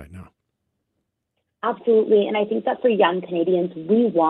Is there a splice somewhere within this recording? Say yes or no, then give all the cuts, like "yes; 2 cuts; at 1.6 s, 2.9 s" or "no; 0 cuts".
no; 0 cuts